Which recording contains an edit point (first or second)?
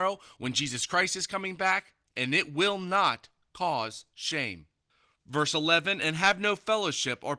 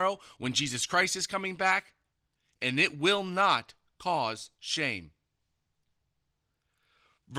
first